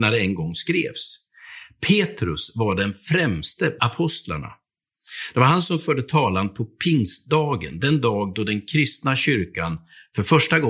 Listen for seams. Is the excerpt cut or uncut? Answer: cut